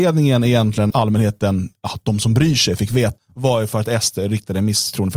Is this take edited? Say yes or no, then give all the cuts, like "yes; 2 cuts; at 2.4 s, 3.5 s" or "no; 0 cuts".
yes; 2 cuts; at 0.9 s, 3.2 s